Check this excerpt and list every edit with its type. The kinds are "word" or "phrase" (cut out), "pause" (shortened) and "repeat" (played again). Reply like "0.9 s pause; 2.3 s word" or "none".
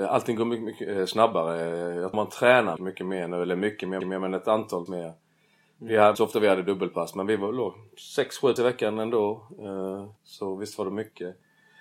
2.1 s word; 2.8 s word; 4.0 s repeat; 4.9 s word; 6.1 s word; 8.6 s word; 10.2 s pause